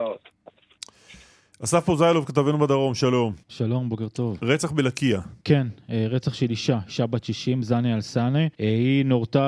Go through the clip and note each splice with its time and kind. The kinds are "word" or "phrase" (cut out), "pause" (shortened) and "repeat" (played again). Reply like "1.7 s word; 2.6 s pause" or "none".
3.4 s pause; 5.4 s pause; 8.5 s pause